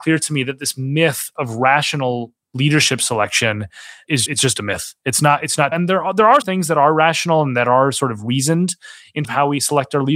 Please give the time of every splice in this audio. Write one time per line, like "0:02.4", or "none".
0:04.3
0:05.7
0:06.4
0:09.2